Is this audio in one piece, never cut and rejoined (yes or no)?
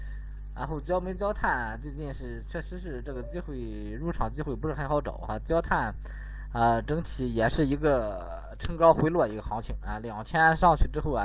yes